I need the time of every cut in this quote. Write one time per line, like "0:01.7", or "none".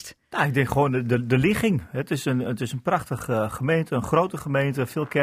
none